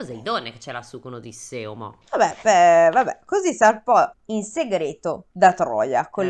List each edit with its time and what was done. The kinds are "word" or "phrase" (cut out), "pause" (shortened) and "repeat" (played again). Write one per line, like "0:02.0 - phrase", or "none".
0:02.0 - pause
0:04.1 - pause
0:05.3 - pause